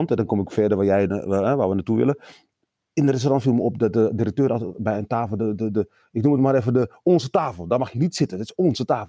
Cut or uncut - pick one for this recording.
uncut